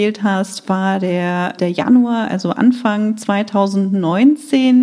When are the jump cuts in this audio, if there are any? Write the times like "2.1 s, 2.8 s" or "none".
1.6 s